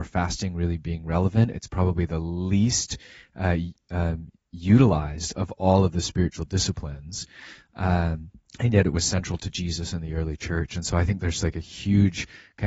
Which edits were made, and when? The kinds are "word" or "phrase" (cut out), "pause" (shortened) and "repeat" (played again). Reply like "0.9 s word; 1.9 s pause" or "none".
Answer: 8.4 s pause

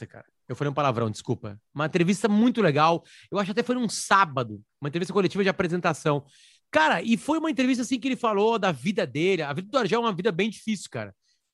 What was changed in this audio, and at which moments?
none

